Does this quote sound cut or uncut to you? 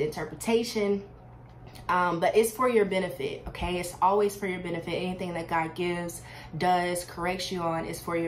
uncut